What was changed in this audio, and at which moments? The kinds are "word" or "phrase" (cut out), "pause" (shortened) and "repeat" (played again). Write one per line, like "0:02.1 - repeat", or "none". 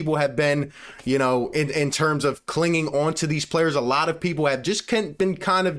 none